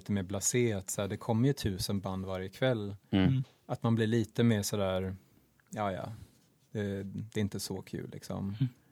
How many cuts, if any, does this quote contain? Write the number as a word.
zero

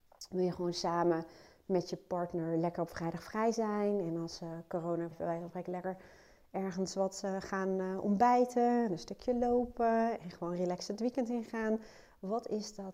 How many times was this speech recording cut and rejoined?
one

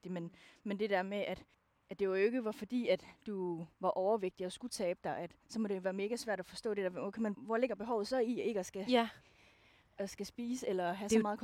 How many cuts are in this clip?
three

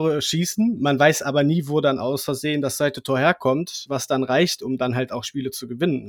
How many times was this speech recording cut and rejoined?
one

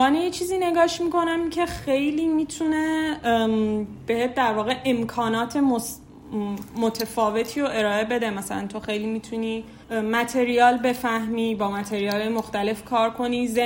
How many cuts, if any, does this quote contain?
one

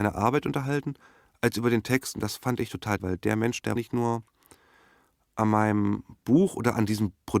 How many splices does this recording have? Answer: two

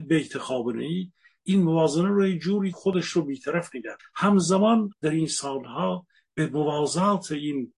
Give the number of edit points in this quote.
three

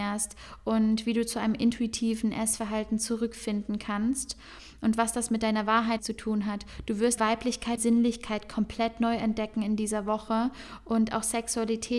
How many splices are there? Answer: three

